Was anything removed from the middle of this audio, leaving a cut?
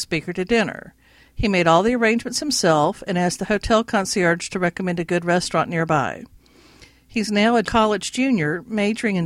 no; 0 cuts

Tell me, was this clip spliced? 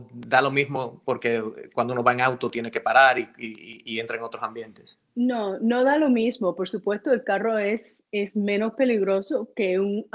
yes; 1 cut; at 5.0 s

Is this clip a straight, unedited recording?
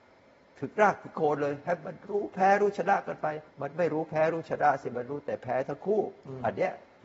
no; 1 cut; at 3.5 s

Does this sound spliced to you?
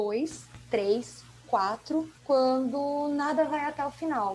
yes; 1 cut; at 2.2 s

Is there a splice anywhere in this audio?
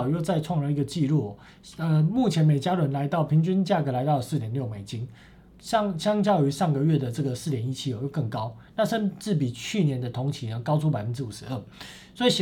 no; 0 cuts

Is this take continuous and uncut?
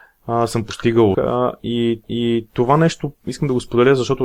no; 3 cuts; at 1.1 s, 2.0 s, 3.2 s

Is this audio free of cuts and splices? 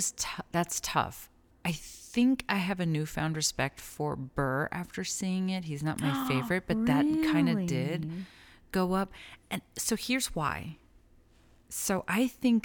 yes; 0 cuts

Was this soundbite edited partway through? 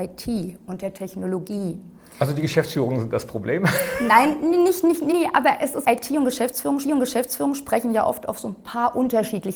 yes; 3 cuts; at 5.1 s, 5.8 s, 6.8 s

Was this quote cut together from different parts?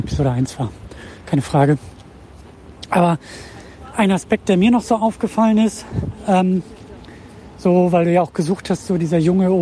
no; 0 cuts

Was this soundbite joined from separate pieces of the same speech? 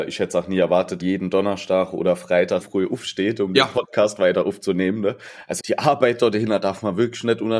yes; 3 cuts; at 1.0 s, 2.6 s, 5.6 s

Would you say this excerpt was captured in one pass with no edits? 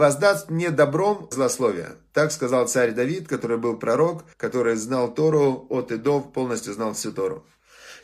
no; 2 cuts; at 1.3 s, 4.3 s

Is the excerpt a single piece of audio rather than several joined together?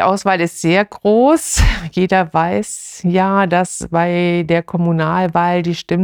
yes; 0 cuts

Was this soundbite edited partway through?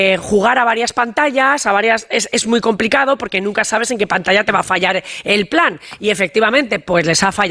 no; 0 cuts

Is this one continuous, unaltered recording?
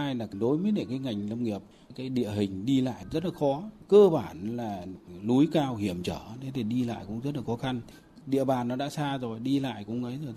yes; 0 cuts

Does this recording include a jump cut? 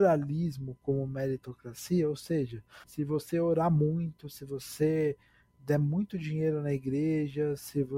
yes; 1 cut; at 2.8 s

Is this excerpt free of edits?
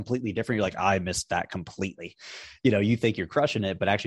yes; 0 cuts

